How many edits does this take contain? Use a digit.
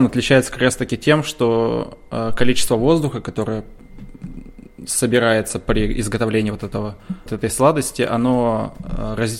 1